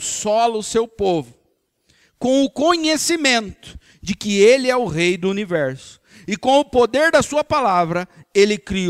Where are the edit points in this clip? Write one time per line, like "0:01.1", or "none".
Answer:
none